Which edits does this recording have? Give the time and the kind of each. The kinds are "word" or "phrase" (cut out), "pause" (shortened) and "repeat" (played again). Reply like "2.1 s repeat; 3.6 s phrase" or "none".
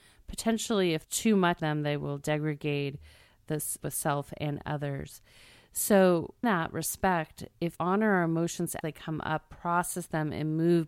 1.0 s word; 1.6 s word; 3.8 s word; 6.4 s word; 7.8 s word; 8.8 s word